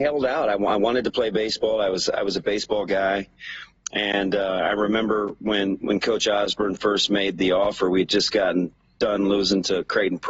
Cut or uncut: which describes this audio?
uncut